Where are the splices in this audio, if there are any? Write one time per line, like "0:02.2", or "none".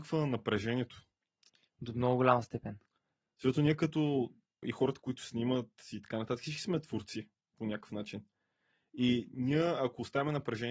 0:04.6